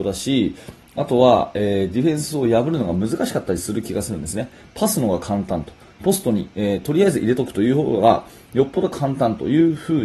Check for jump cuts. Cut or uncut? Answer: uncut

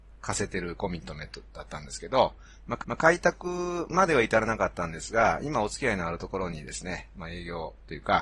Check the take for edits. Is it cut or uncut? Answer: cut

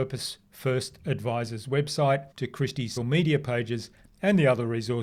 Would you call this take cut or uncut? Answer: cut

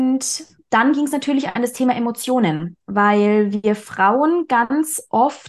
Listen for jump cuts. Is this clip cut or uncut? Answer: uncut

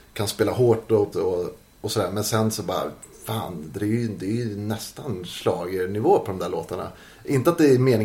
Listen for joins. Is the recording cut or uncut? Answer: cut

